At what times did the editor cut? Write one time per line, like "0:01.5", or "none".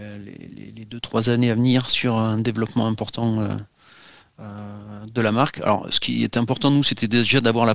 none